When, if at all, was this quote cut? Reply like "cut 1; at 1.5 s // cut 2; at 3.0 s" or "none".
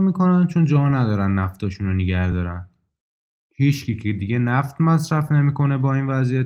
none

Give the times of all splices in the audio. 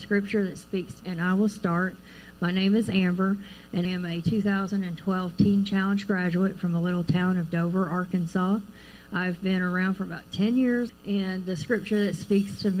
cut 1; at 1.0 s // cut 2; at 3.8 s // cut 3; at 10.9 s

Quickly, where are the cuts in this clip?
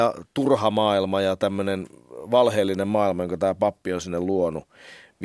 none

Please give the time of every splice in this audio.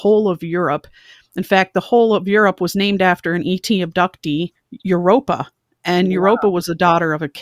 none

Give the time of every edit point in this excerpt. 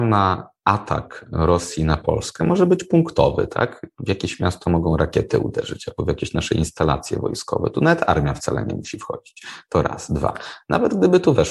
none

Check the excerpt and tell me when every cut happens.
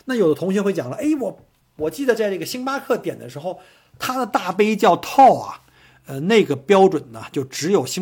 none

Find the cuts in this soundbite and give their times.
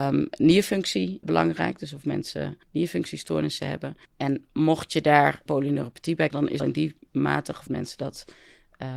cut 1; at 1.2 s // cut 2; at 2.6 s // cut 3; at 4.1 s // cut 4; at 5.5 s // cut 5; at 6.3 s // cut 6; at 6.6 s // cut 7; at 7.7 s

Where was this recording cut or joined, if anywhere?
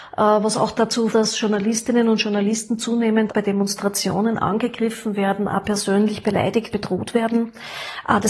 cut 1; at 1.1 s // cut 2; at 3.3 s // cut 3; at 6.7 s

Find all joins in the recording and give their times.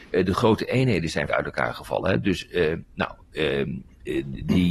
cut 1; at 1.3 s

